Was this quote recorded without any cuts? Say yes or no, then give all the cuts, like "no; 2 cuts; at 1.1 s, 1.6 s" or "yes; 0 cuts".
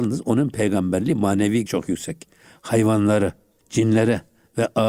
no; 2 cuts; at 1.7 s, 3.6 s